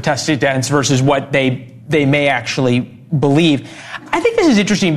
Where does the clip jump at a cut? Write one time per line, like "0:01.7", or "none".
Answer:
none